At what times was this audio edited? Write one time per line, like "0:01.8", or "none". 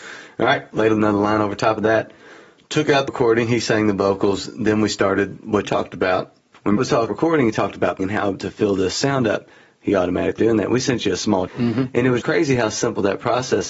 0:03.1
0:05.6
0:06.8
0:07.1
0:08.0
0:10.4
0:11.5
0:12.2

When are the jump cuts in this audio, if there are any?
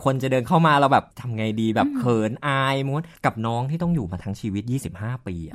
0:01.1
0:03.2

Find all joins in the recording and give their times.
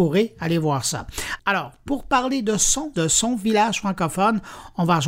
0:02.9

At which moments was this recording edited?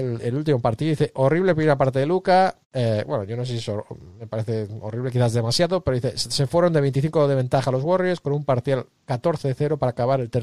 0:02.6

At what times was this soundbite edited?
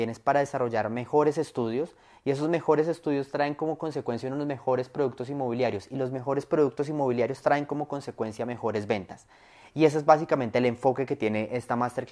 none

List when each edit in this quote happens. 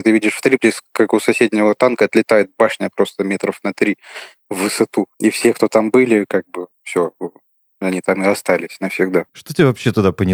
0:05.1
0:06.7
0:09.3

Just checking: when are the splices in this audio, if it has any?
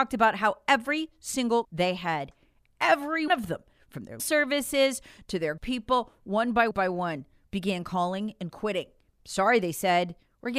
0:01.6
0:03.3
0:04.2
0:05.6
0:06.7

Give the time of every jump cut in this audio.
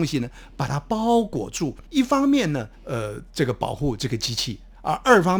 0:01.9
0:02.7

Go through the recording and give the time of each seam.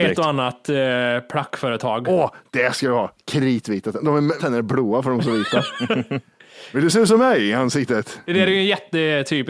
0:04.4

